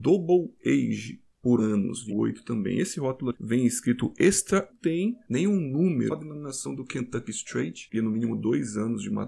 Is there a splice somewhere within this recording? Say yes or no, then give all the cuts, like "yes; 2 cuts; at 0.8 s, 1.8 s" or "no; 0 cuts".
yes; 6 cuts; at 1.6 s, 2.1 s, 3.3 s, 4.7 s, 6.1 s, 7.9 s